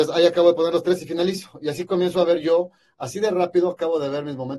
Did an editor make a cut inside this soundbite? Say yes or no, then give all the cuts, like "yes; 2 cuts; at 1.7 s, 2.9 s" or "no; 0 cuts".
no; 0 cuts